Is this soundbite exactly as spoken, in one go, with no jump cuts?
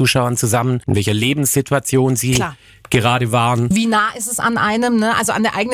yes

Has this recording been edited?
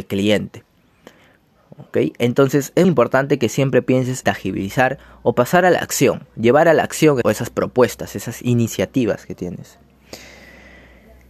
yes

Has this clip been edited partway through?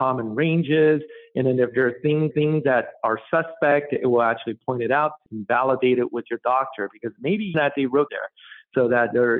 yes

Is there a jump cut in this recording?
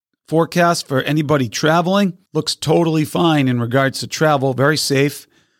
yes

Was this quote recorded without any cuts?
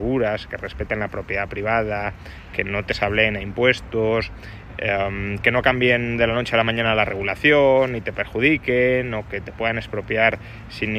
yes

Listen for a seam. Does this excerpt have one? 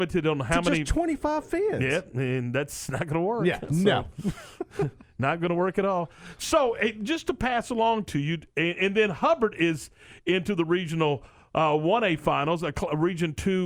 no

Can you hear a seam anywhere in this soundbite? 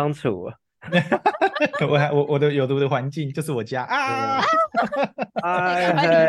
yes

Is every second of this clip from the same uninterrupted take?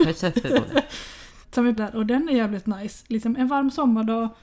no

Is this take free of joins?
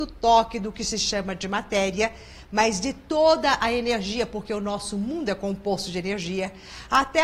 yes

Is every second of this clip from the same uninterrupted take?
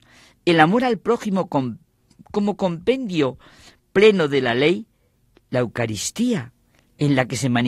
yes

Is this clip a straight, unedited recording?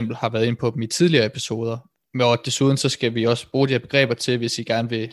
yes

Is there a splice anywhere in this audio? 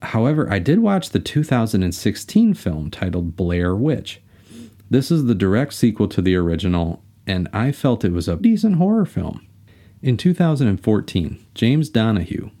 yes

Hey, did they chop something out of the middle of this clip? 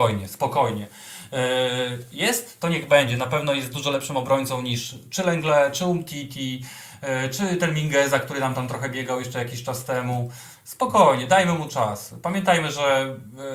no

